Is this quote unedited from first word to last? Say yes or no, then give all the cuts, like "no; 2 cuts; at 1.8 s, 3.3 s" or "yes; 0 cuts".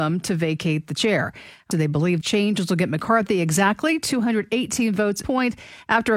no; 3 cuts; at 1.7 s, 2.2 s, 5.2 s